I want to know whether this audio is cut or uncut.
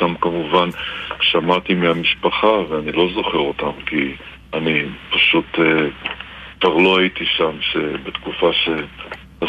cut